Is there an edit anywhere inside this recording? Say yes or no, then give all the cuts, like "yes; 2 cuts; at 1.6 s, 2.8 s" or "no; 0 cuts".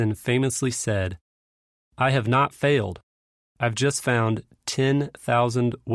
no; 0 cuts